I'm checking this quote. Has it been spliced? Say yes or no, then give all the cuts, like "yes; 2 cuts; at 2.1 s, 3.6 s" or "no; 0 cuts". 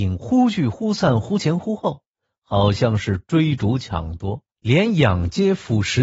yes; 1 cut; at 4.5 s